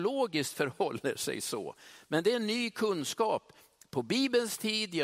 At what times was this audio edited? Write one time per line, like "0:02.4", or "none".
none